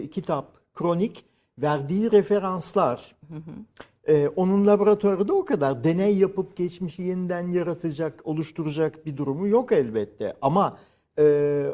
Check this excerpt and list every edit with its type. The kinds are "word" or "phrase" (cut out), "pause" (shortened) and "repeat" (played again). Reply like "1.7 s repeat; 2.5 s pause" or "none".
none